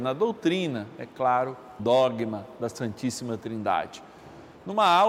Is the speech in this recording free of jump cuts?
no; 1 cut; at 1.8 s

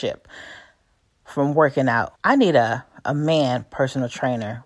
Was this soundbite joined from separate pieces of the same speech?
yes; 1 cut; at 2.2 s

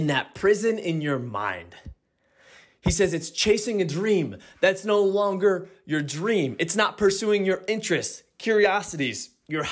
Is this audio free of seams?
yes; 0 cuts

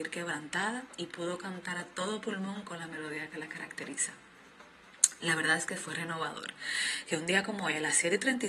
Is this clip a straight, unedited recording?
yes; 0 cuts

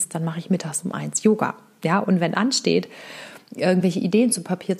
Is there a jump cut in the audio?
no; 0 cuts

